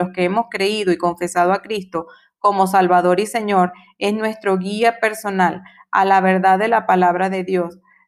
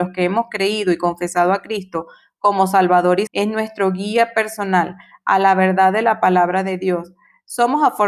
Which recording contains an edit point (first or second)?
second